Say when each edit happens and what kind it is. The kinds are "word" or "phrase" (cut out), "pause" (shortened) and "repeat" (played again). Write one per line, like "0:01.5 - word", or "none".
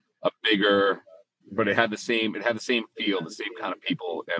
0:01.4 - phrase